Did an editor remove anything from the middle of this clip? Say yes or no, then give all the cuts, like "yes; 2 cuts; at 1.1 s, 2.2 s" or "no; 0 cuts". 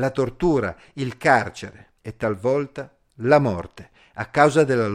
yes; 1 cut; at 2.0 s